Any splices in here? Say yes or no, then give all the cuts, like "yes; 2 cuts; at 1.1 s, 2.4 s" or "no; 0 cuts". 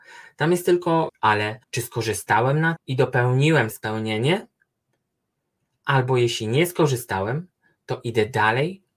yes; 4 cuts; at 1.1 s, 1.6 s, 2.8 s, 3.7 s